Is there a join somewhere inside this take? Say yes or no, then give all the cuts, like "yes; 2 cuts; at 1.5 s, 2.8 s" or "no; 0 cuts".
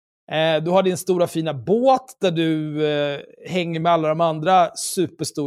no; 0 cuts